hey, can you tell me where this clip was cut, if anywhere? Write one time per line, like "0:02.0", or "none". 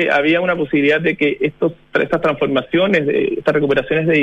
none

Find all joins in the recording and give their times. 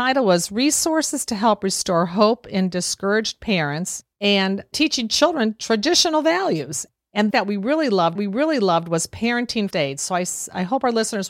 0:04.1
0:07.3
0:08.2
0:09.7

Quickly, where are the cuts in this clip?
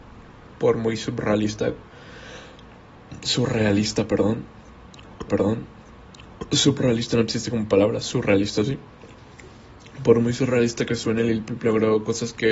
0:05.3

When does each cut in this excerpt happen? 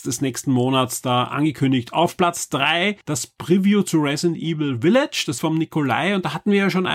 0:03.0
0:05.4

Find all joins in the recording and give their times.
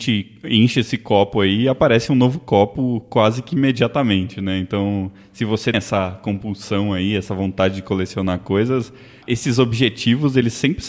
0:05.7
0:09.2

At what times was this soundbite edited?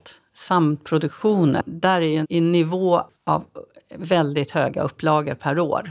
0:02.2
0:03.1

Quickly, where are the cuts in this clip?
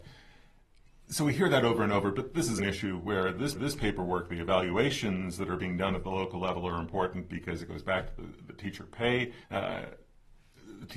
0:02.6
0:03.5
0:09.4

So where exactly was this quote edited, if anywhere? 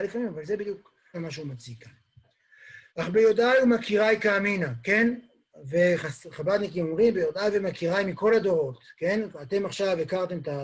0:01.1
0:02.9

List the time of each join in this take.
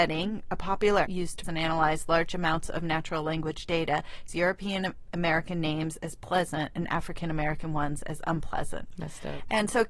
0:01.0
0:01.4
0:04.3

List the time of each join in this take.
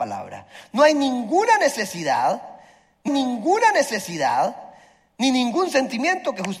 0:03.1

